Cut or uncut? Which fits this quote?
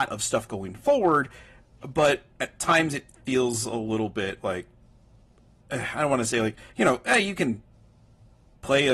cut